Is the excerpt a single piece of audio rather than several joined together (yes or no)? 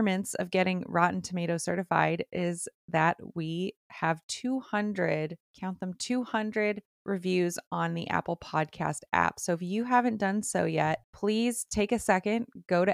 no